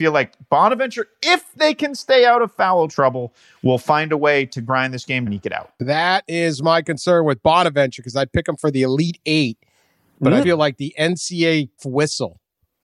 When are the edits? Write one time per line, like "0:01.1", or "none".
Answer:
0:05.3
0:10.4
0:11.8